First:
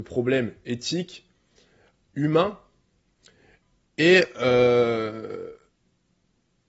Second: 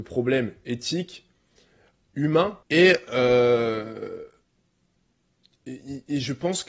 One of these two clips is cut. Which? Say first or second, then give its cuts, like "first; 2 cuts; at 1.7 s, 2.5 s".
second; 1 cut; at 2.6 s